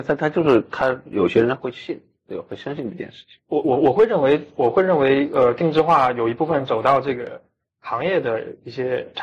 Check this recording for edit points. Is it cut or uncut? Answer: uncut